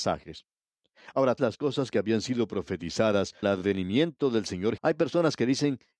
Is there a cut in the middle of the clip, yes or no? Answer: yes